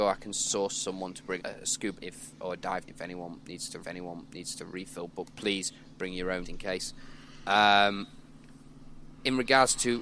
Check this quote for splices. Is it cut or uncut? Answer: cut